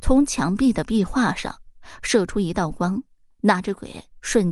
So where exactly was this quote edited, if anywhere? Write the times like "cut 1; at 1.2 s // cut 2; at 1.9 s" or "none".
none